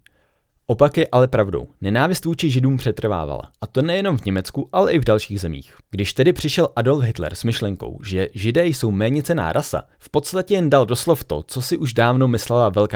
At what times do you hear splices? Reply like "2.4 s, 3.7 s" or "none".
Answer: 3.5 s, 5.8 s, 9.9 s